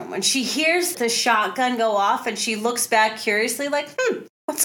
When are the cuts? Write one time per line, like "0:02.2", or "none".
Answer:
0:00.9